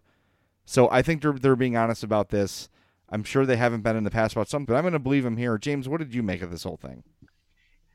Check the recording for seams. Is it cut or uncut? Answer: cut